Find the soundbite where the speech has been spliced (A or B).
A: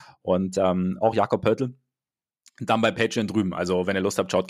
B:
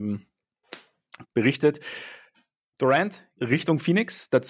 B